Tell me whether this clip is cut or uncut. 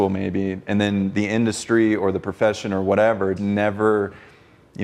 cut